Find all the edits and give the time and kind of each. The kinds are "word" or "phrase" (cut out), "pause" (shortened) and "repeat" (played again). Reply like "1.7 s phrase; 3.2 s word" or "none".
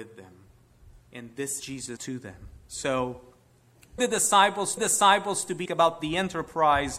1.6 s word; 2.0 s word; 4.0 s word; 4.8 s repeat; 5.7 s word

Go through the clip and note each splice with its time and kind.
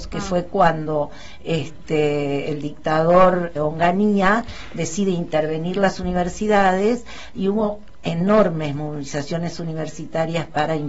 3.6 s word

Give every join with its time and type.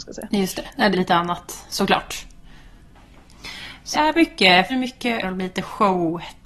0.9 s word; 3.9 s word; 4.7 s word; 5.2 s word

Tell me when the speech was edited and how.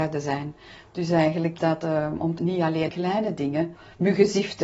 1.6 s word; 2.4 s phrase; 2.9 s word

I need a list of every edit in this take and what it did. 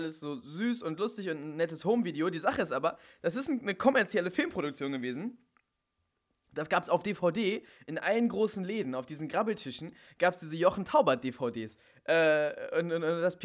none

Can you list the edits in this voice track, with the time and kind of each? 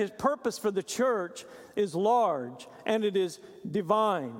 none

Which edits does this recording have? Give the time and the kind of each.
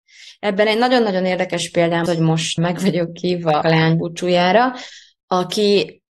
2.1 s word; 2.6 s word; 3.6 s phrase

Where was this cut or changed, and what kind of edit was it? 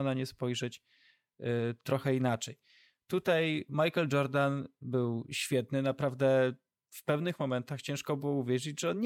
none

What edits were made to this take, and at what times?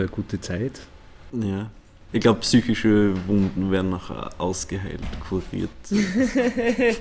none

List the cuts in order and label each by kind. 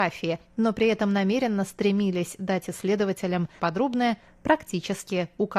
3.6 s word

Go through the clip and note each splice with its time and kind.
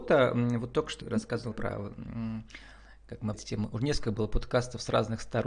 1.0 s word; 1.5 s word; 3.3 s word

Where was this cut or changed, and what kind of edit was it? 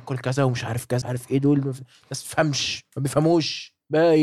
1.0 s word

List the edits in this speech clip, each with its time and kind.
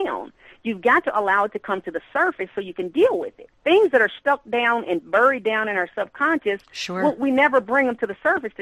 3.6 s pause

